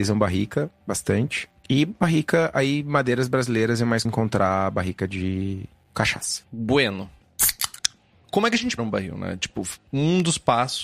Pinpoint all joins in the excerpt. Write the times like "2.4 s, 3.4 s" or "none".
4.0 s, 8.8 s